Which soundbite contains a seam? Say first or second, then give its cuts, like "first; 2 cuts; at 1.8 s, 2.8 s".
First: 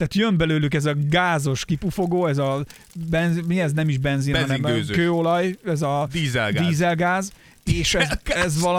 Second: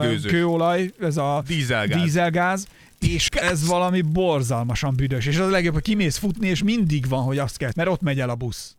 second; 2 cuts; at 3.3 s, 7.7 s